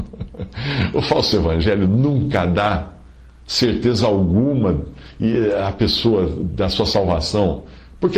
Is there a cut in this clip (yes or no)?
no